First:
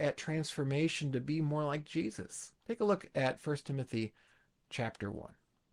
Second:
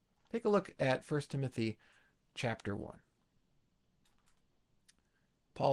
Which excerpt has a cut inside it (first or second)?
first